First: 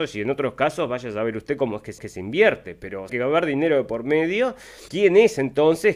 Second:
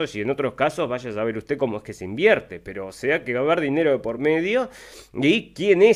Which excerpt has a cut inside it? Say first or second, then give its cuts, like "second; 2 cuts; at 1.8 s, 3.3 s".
first; 3 cuts; at 2.0 s, 3.1 s, 4.9 s